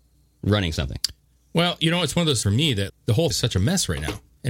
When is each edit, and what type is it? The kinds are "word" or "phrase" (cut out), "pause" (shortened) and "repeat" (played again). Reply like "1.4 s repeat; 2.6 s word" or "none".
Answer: 2.4 s word; 2.9 s word; 3.3 s word

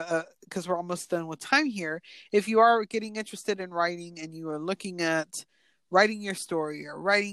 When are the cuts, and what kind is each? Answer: none

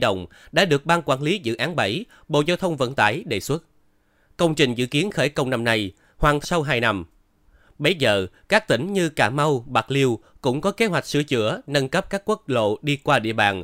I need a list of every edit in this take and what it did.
6.4 s word

